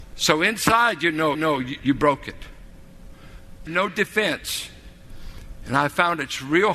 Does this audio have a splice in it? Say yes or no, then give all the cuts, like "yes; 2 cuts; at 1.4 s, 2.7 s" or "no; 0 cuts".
yes; 2 cuts; at 1.3 s, 3.7 s